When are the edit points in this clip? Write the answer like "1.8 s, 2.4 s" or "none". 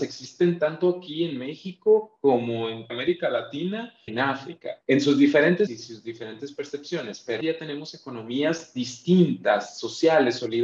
2.9 s, 4.1 s, 4.8 s, 5.7 s, 7.4 s